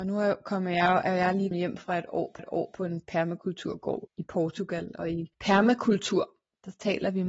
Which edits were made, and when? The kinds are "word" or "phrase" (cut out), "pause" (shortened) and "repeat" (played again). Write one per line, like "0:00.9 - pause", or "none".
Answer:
0:01.5 - word
0:02.4 - repeat
0:04.0 - word
0:05.3 - pause